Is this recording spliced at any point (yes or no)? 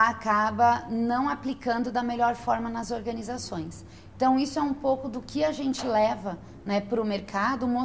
no